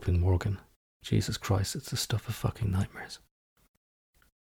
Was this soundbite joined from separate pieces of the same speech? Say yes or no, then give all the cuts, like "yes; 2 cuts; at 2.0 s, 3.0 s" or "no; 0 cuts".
no; 0 cuts